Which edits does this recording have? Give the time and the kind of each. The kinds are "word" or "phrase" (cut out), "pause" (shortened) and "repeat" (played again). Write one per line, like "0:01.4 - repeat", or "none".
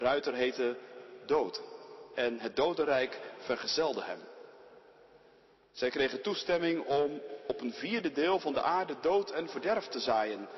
none